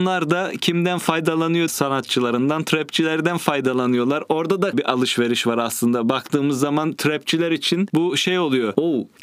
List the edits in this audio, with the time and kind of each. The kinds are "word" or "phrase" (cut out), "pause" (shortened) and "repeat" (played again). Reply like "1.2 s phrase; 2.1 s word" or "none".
1.7 s phrase; 4.7 s word